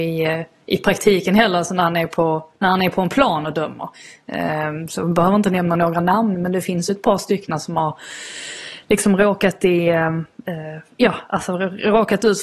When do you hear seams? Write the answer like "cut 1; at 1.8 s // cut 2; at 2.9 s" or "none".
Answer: none